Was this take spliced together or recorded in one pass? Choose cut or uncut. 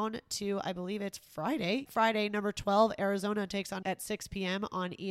cut